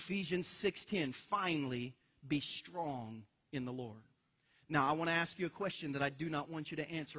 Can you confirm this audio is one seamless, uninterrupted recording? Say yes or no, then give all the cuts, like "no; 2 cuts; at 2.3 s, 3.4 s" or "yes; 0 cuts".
yes; 0 cuts